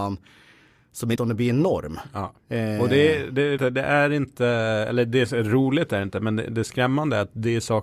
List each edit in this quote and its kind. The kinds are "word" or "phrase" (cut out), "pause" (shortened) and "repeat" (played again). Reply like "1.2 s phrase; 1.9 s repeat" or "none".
1.2 s word; 3.6 s word